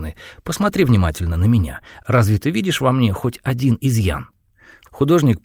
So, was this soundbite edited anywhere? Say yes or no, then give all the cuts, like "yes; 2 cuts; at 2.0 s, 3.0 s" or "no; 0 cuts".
no; 0 cuts